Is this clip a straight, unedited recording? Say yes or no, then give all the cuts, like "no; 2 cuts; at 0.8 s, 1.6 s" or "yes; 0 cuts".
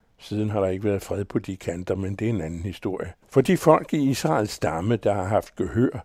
no; 1 cut; at 3.2 s